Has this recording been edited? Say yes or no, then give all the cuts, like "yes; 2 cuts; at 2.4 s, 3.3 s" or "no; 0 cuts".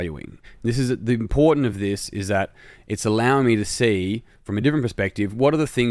no; 0 cuts